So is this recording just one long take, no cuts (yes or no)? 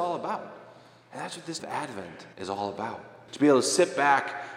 no